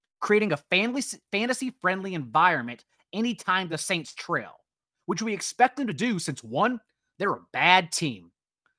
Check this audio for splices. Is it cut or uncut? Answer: uncut